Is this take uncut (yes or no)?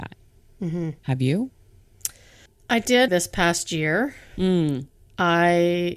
no